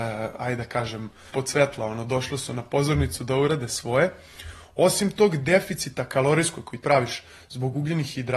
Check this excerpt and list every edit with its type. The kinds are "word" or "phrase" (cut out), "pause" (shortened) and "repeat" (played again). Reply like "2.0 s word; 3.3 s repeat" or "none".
1.3 s word; 6.8 s word